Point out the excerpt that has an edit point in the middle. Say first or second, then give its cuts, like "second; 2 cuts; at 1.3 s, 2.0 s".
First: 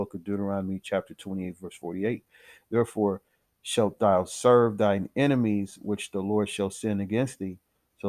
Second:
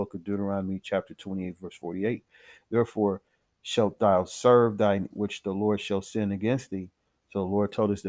second; 1 cut; at 5.1 s